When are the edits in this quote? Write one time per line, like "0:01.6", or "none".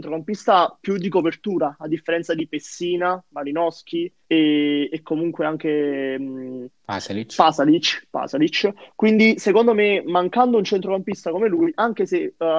0:04.2

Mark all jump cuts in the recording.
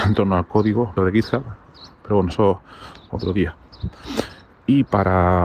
0:01.0
0:03.1

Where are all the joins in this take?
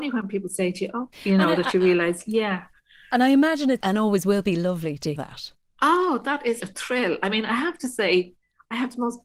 0:01.1
0:03.8
0:05.2
0:06.6

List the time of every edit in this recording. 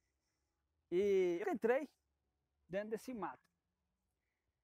0:01.4

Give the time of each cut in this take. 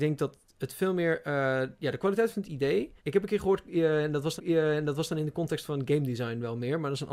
0:03.0
0:04.4

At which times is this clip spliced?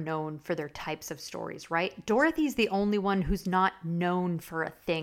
none

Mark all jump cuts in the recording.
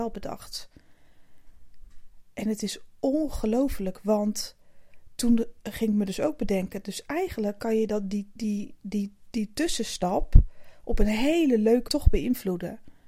0:11.9

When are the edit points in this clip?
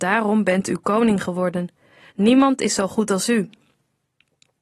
none

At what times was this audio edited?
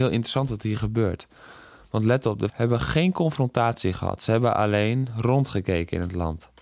0:02.5

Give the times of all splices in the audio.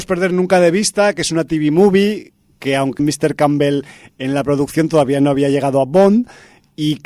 0:03.0

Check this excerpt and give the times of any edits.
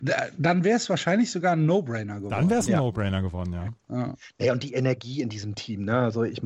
none

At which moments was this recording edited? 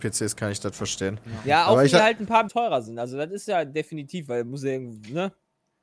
0:02.5

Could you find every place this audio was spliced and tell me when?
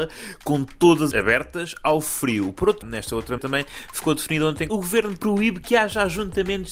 0:01.1
0:02.8
0:03.4
0:04.7

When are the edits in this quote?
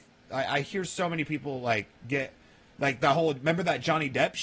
none

